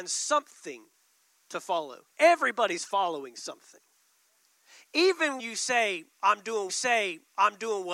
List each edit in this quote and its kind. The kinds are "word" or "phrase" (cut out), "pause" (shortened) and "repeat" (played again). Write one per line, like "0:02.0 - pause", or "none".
0:02.1 - pause
0:05.4 - word
0:06.7 - repeat